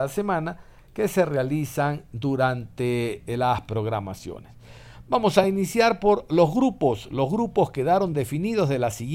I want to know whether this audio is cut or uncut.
uncut